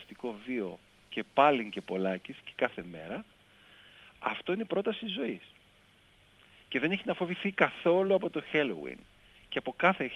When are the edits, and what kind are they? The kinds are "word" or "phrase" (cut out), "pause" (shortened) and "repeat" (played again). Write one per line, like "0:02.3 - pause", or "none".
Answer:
none